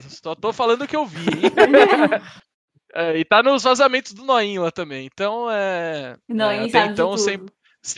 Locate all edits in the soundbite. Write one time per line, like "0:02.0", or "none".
none